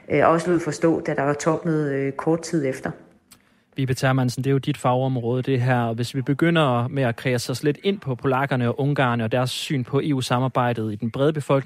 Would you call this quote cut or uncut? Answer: uncut